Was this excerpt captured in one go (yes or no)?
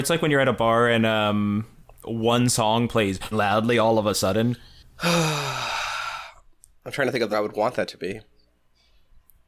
no